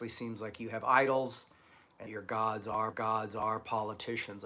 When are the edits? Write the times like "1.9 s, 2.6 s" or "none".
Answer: 2.1 s, 2.9 s

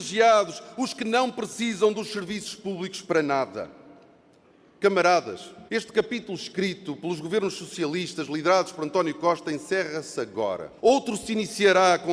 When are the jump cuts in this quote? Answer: 5.7 s, 10.8 s

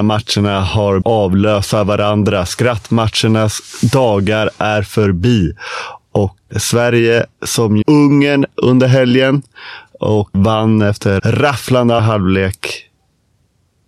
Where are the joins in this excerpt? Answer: 1.0 s, 6.5 s, 7.8 s, 10.3 s, 11.2 s, 12.0 s

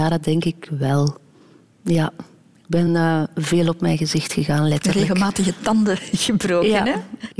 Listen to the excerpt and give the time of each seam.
none

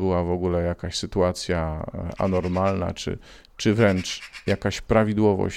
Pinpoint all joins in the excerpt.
none

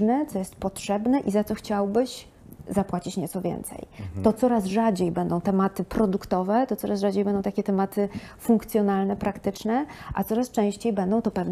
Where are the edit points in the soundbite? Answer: none

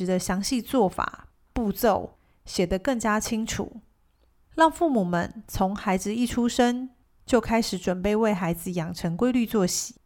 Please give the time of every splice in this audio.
none

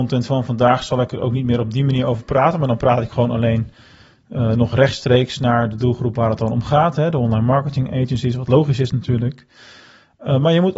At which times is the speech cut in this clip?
none

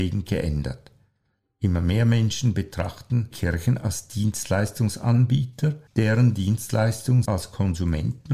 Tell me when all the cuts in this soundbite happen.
3.3 s, 7.2 s

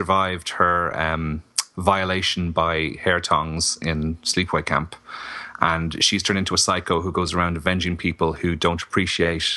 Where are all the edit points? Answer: none

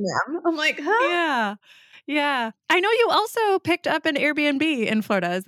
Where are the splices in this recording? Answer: none

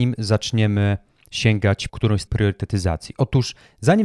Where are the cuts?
1.9 s, 2.3 s

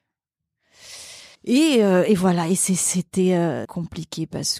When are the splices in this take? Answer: 1.3 s, 3.6 s

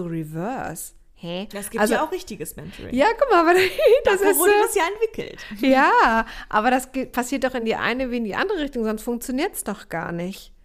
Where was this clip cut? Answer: none

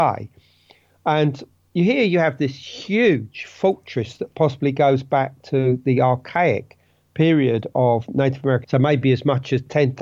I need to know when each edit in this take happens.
8.6 s

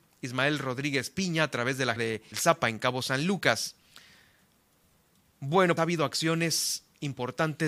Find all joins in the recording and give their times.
2.0 s, 2.3 s, 5.8 s

